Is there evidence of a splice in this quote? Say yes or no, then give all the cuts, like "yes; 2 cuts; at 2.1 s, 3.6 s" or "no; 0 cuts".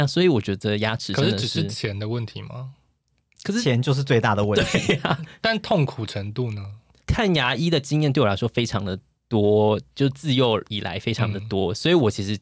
no; 0 cuts